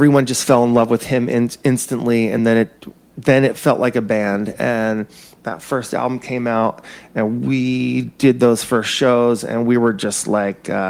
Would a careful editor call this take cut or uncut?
uncut